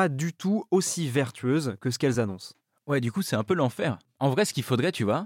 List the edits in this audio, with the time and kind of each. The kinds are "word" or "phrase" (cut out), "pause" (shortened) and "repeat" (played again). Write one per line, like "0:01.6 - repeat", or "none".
none